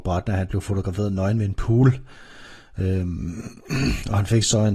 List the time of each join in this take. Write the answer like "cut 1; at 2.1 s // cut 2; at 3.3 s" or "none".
none